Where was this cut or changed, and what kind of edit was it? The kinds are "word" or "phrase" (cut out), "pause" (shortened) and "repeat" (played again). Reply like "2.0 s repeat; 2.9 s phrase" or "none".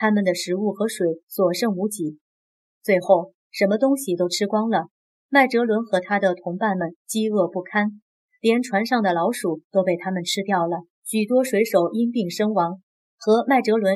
10.9 s pause